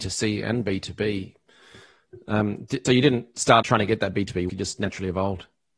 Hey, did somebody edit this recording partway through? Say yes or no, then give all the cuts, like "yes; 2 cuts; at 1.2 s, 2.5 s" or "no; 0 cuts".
yes; 3 cuts; at 2.8 s, 3.6 s, 4.5 s